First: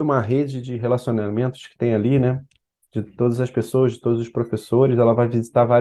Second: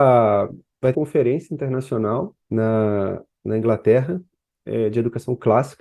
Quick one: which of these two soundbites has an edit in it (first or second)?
second